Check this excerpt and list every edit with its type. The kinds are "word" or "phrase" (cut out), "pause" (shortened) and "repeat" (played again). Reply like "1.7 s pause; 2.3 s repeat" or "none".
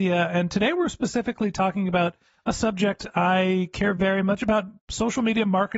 none